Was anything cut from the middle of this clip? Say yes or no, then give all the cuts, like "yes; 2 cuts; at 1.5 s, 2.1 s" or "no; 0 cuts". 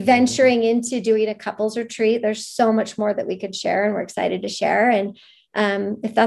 no; 0 cuts